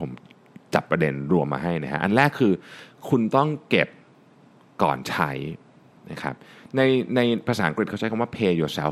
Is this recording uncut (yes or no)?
yes